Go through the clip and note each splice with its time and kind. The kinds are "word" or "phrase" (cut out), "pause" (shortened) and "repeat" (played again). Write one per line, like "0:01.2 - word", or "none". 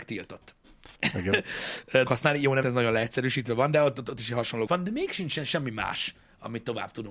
0:01.0 - pause
0:02.1 - word
0:02.6 - word
0:04.7 - word